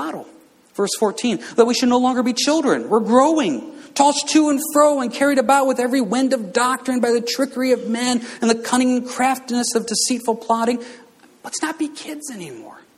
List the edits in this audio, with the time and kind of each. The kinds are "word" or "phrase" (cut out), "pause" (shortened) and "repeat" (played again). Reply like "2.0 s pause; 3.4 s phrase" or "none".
none